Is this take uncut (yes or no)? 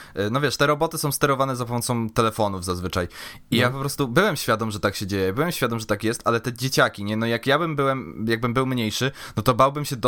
yes